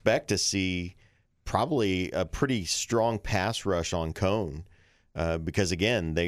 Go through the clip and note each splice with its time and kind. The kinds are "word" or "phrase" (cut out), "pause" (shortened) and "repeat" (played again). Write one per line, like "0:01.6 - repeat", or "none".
none